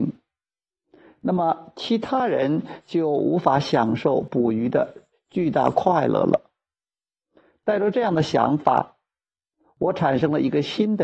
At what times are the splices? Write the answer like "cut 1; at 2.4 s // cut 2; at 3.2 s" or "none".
cut 1; at 5.1 s